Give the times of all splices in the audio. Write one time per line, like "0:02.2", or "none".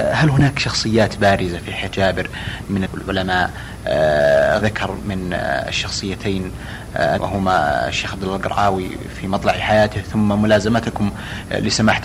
0:01.9
0:02.9
0:04.6
0:07.2